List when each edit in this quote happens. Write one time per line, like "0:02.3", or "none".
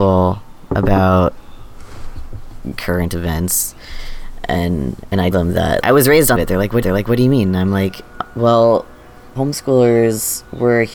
0:05.3
0:05.8
0:06.4
0:06.8
0:09.4